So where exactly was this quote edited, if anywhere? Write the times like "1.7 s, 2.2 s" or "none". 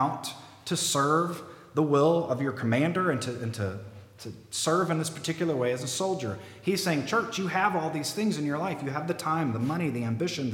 none